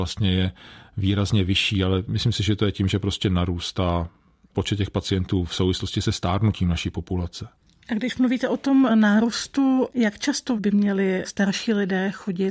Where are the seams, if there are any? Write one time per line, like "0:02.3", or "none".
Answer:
none